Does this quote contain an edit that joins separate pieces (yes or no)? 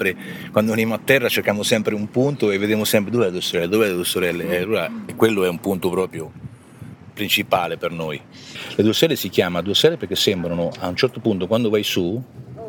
no